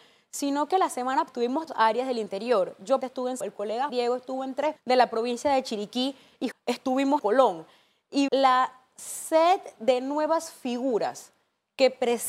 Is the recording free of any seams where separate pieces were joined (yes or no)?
no